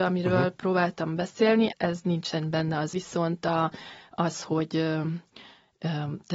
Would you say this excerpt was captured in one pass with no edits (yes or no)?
no